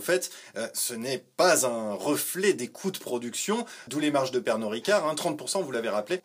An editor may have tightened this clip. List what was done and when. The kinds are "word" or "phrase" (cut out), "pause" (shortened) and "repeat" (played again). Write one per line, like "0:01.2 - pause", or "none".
0:03.9 - word